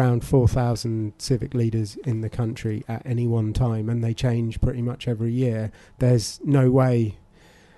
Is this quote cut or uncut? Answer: uncut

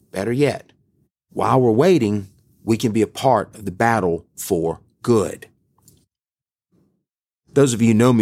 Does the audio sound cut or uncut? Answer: uncut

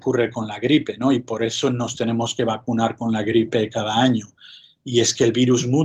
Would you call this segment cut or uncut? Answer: uncut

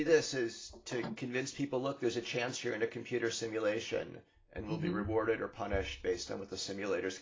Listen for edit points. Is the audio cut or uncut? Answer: uncut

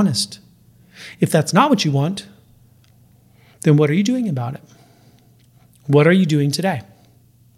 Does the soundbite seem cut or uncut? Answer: uncut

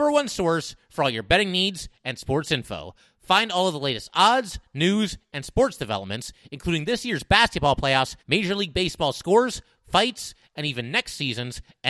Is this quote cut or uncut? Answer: cut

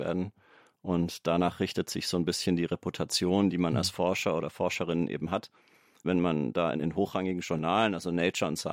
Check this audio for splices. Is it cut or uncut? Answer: uncut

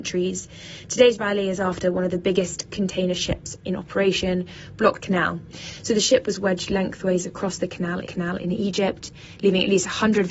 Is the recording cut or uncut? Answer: cut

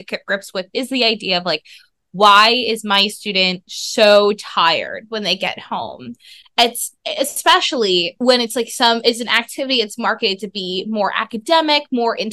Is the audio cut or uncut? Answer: uncut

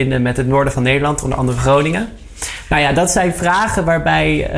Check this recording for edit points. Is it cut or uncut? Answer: uncut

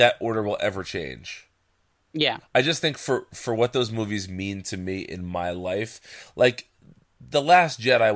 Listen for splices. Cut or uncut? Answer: uncut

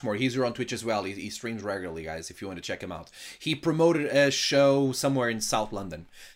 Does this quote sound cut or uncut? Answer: uncut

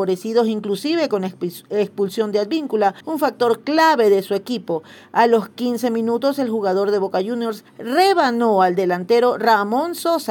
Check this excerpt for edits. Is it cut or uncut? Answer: cut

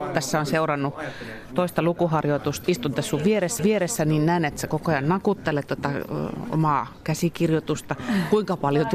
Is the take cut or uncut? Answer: cut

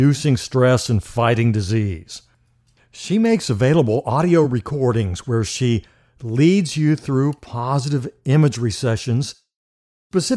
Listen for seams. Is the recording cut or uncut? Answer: uncut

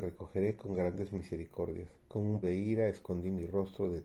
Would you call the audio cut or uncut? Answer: cut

